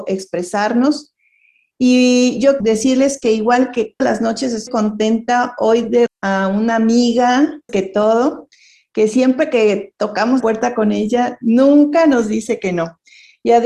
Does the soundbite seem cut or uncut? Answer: cut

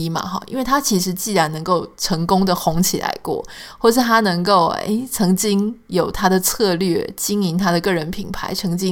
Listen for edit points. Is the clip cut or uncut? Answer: uncut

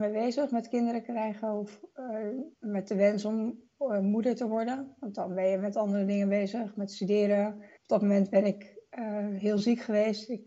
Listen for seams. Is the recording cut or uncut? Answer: cut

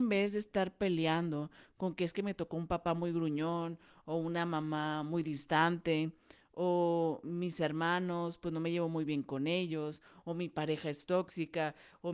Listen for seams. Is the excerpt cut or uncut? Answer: uncut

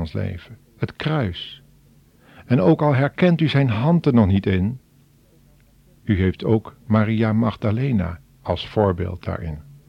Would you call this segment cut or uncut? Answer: uncut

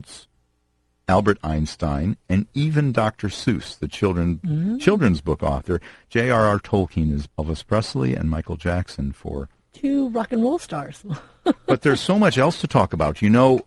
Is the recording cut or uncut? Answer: cut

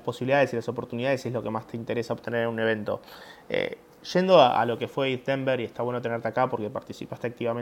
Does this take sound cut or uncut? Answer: uncut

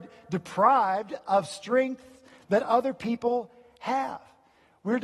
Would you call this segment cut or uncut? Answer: uncut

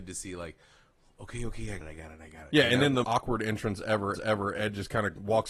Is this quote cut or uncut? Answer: cut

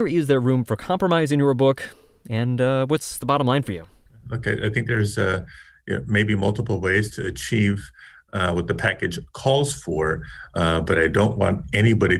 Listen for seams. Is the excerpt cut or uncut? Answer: uncut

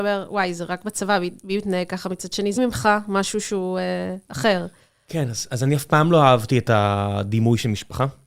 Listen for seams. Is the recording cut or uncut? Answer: cut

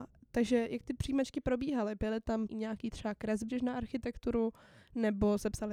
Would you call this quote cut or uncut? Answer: cut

